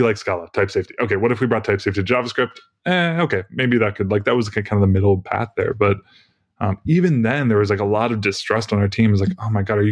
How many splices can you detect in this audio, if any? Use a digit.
0